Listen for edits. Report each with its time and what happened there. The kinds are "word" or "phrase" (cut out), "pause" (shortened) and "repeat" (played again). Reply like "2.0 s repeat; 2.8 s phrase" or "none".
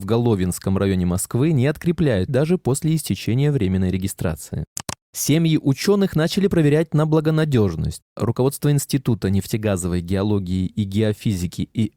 2.3 s word